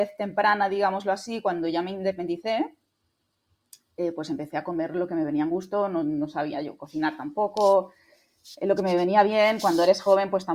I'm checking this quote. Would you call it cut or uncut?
uncut